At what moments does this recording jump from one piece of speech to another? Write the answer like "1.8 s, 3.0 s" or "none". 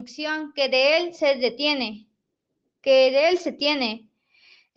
none